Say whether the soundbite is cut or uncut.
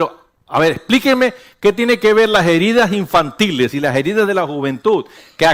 uncut